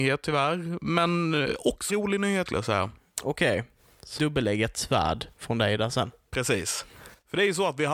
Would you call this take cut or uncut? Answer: cut